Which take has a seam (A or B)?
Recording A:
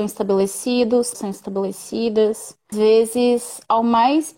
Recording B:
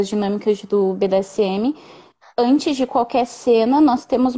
A